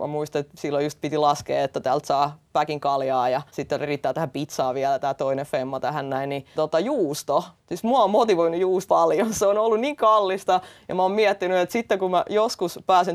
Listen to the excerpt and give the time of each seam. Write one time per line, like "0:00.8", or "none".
0:03.5
0:06.6
0:07.6
0:08.9